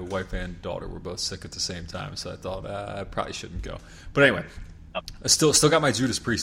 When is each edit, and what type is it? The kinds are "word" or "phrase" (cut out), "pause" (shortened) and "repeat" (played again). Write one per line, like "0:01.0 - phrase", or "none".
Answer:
none